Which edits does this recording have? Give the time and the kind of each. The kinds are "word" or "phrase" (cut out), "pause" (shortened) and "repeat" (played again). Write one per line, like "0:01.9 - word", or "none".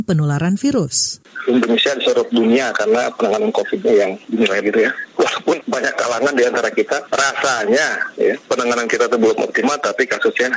0:04.6 - word